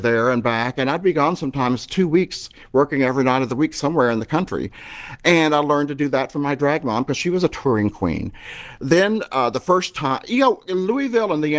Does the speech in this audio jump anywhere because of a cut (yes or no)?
no